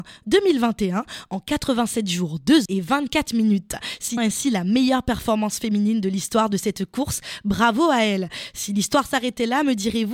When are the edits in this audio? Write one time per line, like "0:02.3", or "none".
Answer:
0:02.7
0:04.2